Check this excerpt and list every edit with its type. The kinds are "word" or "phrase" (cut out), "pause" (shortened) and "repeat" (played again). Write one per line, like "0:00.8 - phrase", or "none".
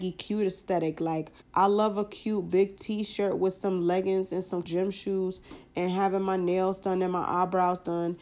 0:01.4 - pause
0:04.6 - word